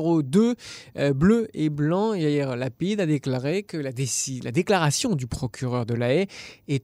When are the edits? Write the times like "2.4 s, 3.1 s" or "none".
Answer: none